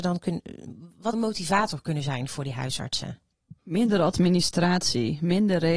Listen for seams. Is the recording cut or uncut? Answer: cut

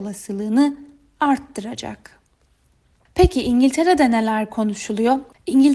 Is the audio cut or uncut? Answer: uncut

